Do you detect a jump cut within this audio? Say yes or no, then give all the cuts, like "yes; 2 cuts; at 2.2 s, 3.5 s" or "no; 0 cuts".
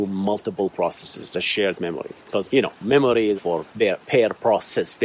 yes; 2 cuts; at 3.3 s, 3.7 s